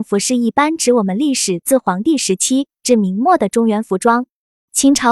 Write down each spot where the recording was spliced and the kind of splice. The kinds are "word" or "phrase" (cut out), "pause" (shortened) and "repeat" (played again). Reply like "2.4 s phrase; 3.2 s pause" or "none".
none